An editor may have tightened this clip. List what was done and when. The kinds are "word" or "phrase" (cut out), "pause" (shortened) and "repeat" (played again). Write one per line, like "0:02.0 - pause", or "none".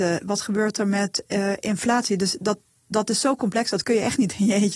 none